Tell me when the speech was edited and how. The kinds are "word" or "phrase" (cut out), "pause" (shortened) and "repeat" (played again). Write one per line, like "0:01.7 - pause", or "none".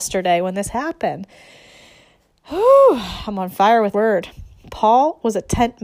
0:03.9 - word